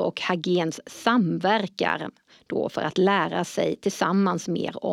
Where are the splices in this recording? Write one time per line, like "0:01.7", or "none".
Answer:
none